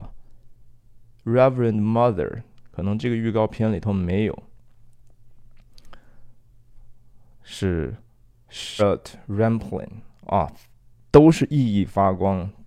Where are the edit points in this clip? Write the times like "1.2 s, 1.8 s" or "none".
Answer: 8.8 s